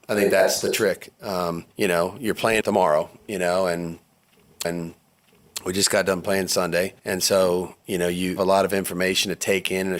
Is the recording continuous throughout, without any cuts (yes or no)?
no